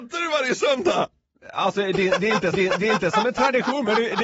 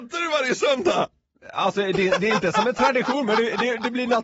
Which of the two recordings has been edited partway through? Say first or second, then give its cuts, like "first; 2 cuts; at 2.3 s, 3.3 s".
first; 1 cut; at 2.5 s